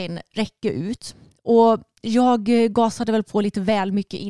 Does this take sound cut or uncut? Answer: uncut